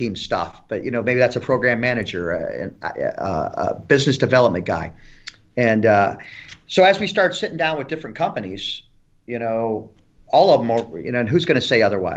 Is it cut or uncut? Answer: uncut